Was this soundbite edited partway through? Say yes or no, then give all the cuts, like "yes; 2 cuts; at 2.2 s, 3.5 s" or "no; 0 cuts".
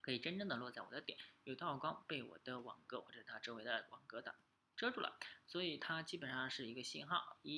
no; 0 cuts